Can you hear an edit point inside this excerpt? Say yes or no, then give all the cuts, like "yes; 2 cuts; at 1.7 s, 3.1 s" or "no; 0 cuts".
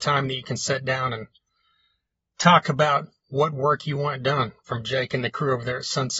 no; 0 cuts